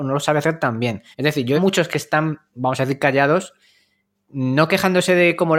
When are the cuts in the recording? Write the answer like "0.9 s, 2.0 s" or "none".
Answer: 1.1 s, 1.6 s, 2.5 s